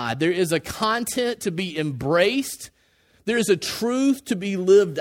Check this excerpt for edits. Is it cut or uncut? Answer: uncut